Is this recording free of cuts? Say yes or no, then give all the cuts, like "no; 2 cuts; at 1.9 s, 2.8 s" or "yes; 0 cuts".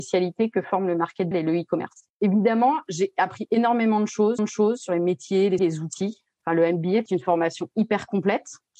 no; 5 cuts; at 1.3 s, 2.1 s, 4.4 s, 5.6 s, 7.1 s